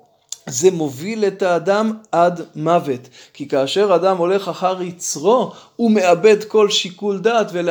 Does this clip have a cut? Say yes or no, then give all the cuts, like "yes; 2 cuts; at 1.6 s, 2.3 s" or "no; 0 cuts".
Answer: no; 0 cuts